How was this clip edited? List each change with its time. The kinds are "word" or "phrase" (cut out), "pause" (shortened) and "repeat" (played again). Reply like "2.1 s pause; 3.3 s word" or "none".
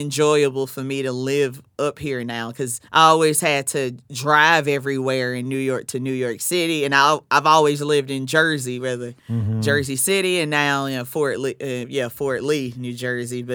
2.9 s pause; 9.2 s pause